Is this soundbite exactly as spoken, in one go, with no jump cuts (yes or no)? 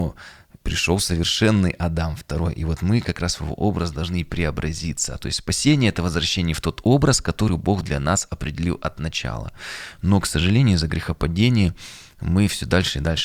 yes